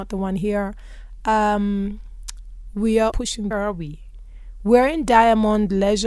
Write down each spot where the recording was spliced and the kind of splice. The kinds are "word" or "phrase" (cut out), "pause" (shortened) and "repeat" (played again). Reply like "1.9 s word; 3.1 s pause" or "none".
3.1 s word; 3.5 s phrase